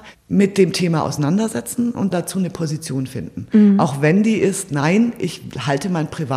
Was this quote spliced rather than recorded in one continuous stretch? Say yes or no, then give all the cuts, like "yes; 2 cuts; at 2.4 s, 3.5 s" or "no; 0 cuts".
yes; 1 cut; at 2.1 s